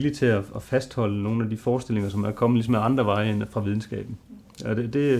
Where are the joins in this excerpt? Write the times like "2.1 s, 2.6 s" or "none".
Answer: none